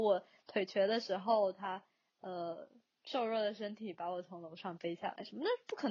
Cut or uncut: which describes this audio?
uncut